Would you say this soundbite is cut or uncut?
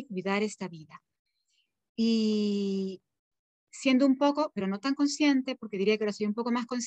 uncut